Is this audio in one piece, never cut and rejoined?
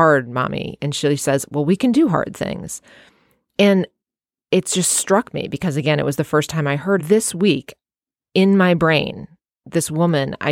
no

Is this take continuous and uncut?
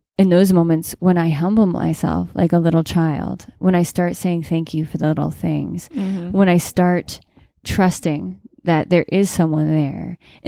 yes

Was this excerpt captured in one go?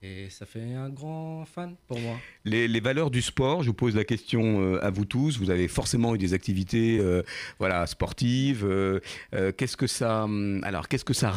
yes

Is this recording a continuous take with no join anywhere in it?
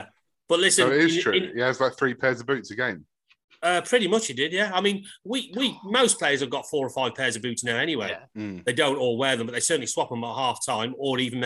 yes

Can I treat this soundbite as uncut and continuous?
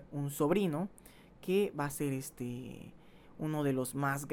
yes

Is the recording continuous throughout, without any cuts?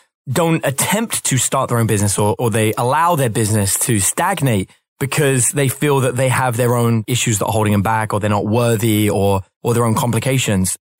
yes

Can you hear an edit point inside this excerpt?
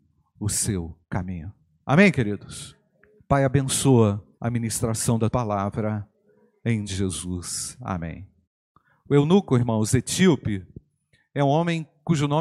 yes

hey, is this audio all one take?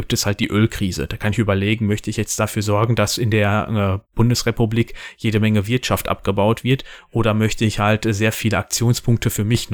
yes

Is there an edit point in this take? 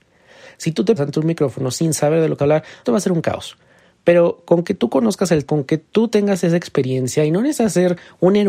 yes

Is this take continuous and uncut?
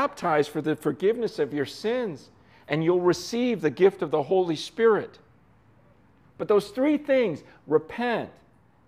yes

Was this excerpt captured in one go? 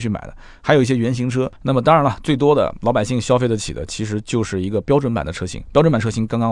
no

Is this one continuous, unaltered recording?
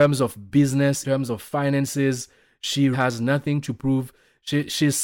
no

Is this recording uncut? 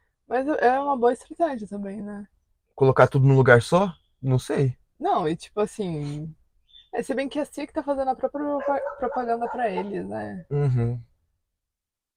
yes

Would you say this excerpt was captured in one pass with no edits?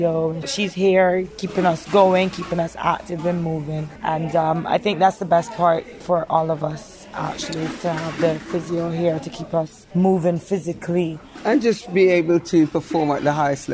yes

